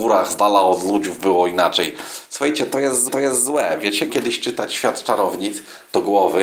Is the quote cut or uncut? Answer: cut